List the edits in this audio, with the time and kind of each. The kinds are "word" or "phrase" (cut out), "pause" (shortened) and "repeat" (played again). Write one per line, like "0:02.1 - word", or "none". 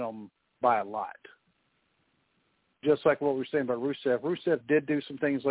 none